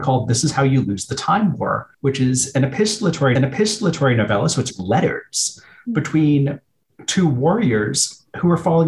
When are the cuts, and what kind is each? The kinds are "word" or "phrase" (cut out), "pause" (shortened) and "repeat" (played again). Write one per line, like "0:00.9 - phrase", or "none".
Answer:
0:01.9 - pause
0:03.4 - repeat
0:04.7 - phrase